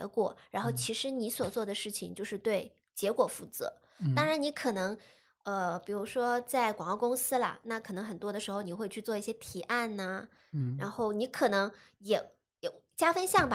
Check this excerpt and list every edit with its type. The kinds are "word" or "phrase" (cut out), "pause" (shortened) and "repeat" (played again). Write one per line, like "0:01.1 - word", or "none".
none